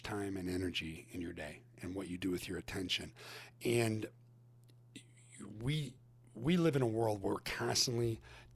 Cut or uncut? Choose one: uncut